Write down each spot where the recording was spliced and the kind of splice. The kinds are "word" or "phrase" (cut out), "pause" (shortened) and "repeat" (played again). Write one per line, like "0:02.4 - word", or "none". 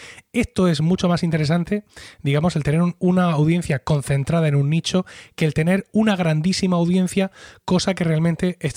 none